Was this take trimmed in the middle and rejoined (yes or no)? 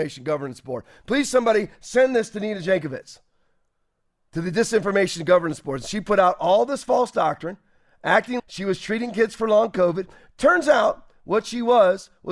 yes